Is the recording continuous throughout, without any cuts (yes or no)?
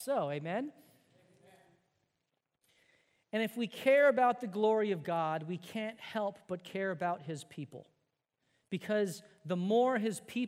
yes